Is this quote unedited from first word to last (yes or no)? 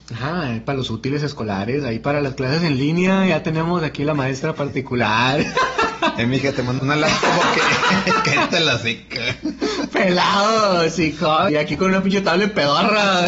no